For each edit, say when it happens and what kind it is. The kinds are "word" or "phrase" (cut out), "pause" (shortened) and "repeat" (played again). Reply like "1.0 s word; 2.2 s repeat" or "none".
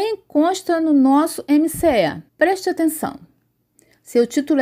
2.3 s pause

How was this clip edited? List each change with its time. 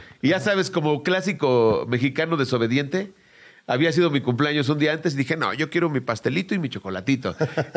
none

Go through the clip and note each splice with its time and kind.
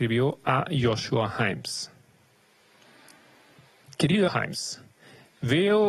4.3 s word

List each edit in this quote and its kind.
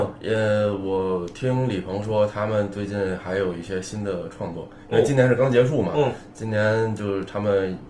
none

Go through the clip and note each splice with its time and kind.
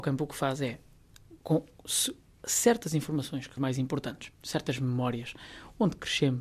3.6 s word

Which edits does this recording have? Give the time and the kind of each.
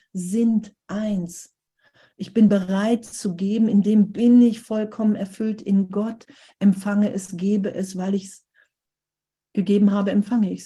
none

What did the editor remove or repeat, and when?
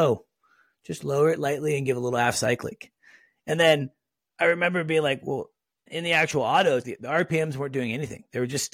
5.9 s word; 6.8 s word

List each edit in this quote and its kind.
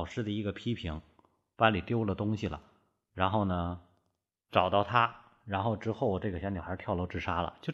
none

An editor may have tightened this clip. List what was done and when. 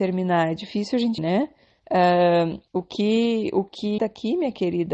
1.2 s word; 2.7 s pause; 4.0 s word

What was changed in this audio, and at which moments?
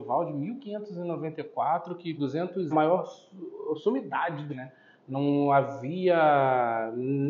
2.2 s word; 2.7 s phrase; 4.5 s word

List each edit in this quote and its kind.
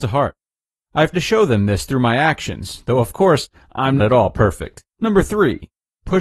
1.1 s word; 4.0 s word; 4.9 s pause

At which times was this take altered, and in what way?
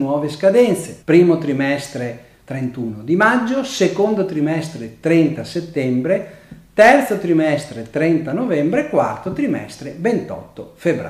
1.0 s pause

